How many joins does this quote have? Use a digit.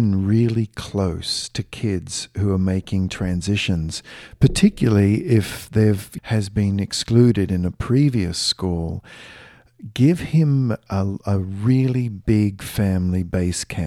1